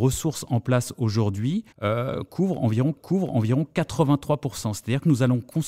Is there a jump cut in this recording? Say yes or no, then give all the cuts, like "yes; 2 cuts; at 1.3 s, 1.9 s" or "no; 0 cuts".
yes; 2 cuts; at 1.7 s, 3.0 s